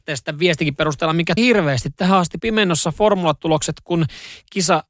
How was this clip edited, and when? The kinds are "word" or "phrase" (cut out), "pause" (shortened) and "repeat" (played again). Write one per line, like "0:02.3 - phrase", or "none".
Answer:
0:01.4 - phrase
0:02.4 - word